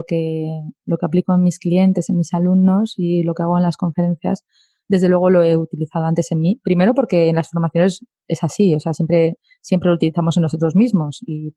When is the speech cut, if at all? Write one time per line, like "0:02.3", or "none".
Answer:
none